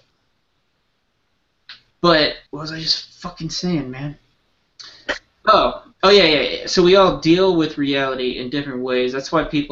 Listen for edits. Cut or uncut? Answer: cut